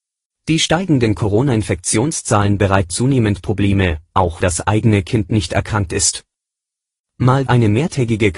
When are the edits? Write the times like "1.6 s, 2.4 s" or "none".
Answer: 2.9 s, 4.4 s, 7.5 s